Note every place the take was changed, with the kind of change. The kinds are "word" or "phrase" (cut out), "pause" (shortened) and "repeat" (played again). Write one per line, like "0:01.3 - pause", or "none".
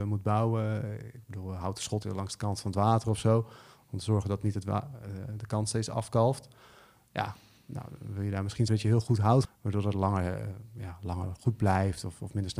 0:02.0 - word
0:08.7 - phrase
0:09.4 - word